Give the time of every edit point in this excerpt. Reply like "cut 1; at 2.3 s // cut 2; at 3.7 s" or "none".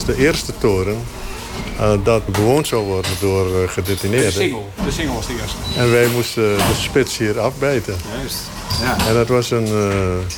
cut 1; at 2.3 s